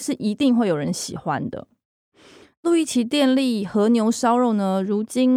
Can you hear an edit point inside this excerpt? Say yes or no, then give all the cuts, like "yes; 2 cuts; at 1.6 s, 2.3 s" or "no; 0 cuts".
no; 0 cuts